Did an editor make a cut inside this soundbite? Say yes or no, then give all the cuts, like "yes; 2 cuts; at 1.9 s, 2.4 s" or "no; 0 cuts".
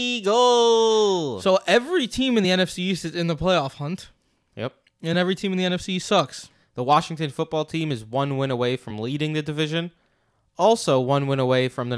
no; 0 cuts